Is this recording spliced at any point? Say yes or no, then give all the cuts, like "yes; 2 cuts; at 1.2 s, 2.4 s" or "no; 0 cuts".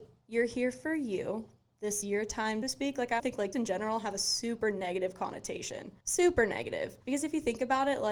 yes; 6 cuts; at 2.0 s, 2.6 s, 3.2 s, 3.5 s, 6.0 s, 7.0 s